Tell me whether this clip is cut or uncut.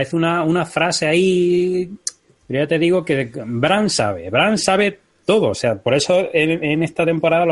cut